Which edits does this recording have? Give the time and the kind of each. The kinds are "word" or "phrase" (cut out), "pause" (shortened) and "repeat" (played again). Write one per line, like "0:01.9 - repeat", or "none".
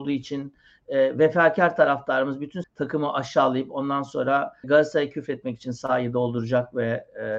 0:02.6 - word
0:04.6 - word